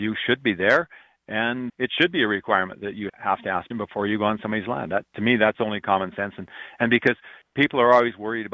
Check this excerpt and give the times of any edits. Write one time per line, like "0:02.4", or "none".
0:01.7
0:03.1
0:03.7